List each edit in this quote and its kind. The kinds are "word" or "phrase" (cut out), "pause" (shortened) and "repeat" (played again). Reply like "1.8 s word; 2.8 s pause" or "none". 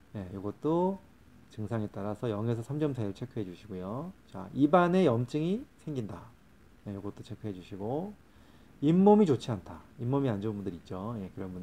none

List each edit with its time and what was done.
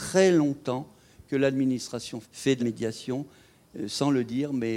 2.2 s word; 2.6 s word

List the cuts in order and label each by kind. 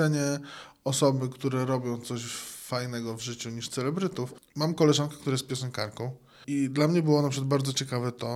none

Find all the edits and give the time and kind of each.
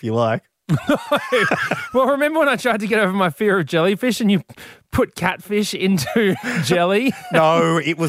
none

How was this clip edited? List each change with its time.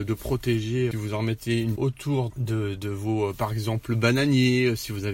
0.9 s phrase; 1.8 s phrase; 2.3 s word

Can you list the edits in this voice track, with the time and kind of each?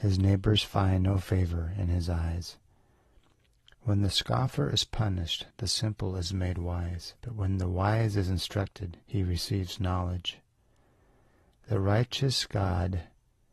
5.5 s pause; 7.2 s pause; 9.0 s pause

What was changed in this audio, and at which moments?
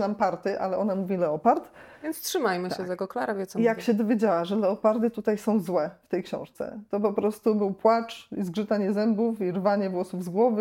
none

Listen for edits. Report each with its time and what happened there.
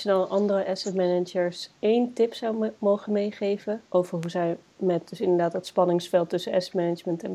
1.8 s pause; 3.9 s pause

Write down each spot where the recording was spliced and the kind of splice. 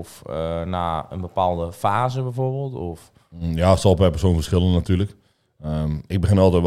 none

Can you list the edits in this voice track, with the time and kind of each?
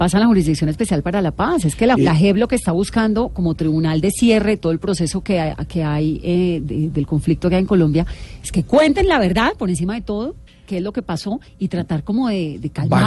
2.0 s word; 10.5 s pause; 11.5 s pause

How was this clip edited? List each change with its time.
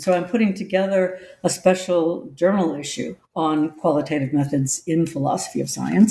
3.2 s pause

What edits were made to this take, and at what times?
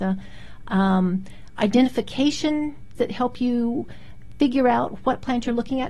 3.0 s word

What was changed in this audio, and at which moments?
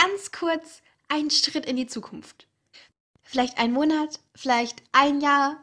none

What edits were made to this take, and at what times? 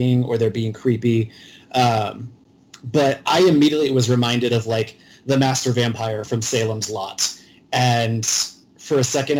none

